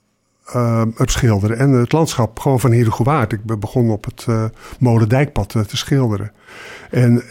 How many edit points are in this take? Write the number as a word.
one